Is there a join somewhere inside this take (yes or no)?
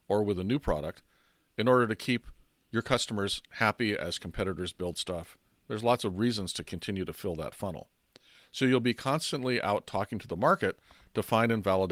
no